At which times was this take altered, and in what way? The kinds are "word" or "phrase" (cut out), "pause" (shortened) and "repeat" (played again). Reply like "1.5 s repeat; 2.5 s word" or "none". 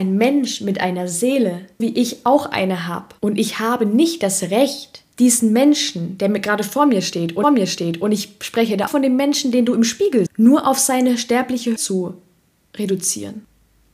1.8 s word; 3.2 s pause; 5.1 s pause; 7.4 s repeat; 8.9 s word; 10.3 s word; 11.8 s word